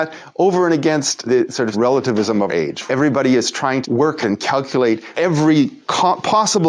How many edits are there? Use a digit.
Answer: 7